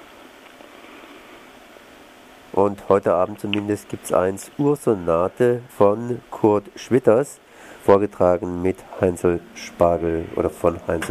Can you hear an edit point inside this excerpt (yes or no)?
yes